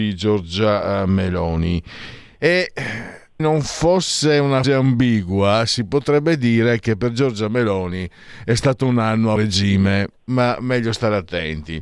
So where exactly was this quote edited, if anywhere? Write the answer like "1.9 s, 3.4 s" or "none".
3.4 s, 4.6 s, 9.4 s